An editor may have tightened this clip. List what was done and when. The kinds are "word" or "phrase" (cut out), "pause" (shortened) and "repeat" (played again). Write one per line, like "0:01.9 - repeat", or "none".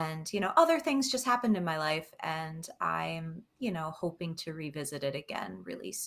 0:03.5 - pause